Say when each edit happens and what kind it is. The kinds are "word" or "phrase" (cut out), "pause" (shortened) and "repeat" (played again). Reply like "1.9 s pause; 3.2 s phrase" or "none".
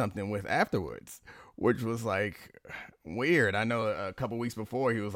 none